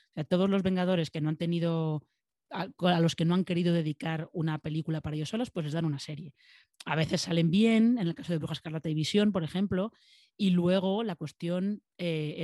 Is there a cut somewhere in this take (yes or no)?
no